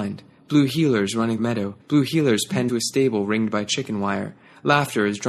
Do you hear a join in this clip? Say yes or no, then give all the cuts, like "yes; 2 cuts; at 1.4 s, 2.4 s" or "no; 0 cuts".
yes; 3 cuts; at 1.4 s, 1.8 s, 2.7 s